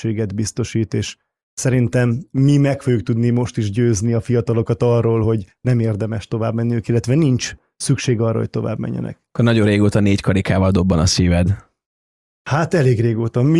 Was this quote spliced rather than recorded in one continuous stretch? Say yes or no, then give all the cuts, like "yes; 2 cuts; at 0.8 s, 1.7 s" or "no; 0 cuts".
no; 0 cuts